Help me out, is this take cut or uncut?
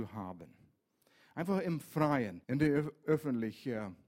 cut